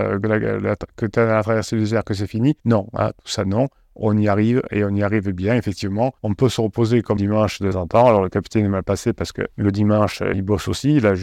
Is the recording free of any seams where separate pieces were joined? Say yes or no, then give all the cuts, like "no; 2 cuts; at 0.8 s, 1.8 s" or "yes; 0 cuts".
no; 6 cuts; at 2.6 s, 6.2 s, 7.2 s, 7.7 s, 9.5 s, 10.3 s